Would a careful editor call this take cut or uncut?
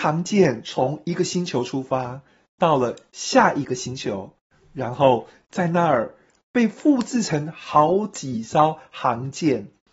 uncut